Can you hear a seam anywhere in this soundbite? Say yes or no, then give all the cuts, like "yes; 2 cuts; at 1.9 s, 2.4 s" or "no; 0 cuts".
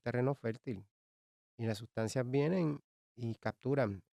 no; 0 cuts